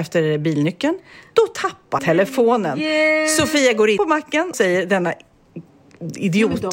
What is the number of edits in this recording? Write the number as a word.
three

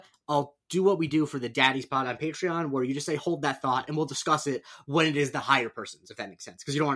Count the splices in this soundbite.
zero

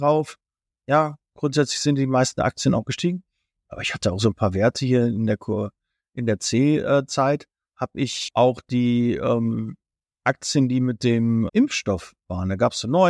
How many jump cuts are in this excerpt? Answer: one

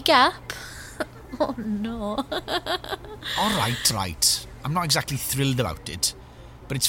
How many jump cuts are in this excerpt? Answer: one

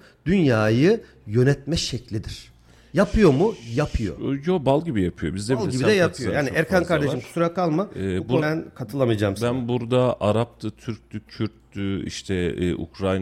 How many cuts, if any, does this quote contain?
one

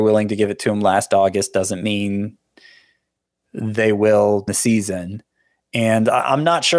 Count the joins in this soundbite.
one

